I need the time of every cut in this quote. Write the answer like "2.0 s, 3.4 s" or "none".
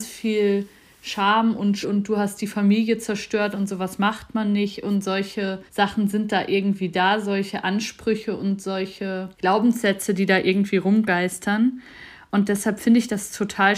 1.8 s, 5.7 s, 9.3 s